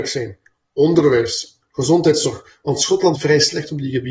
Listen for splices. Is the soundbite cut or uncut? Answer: cut